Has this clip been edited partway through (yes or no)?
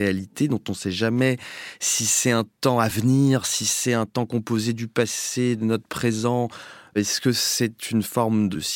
no